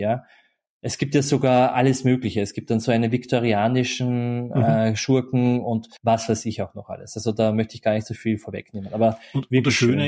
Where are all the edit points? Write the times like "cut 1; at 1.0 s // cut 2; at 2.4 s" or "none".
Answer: cut 1; at 6.0 s